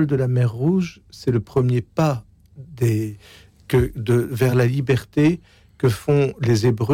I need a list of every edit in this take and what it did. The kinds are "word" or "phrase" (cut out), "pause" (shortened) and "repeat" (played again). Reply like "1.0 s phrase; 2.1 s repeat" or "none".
none